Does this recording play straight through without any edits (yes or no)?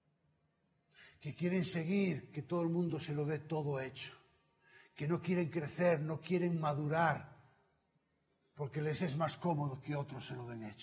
yes